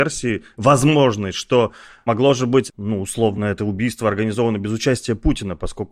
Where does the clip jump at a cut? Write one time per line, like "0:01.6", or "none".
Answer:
none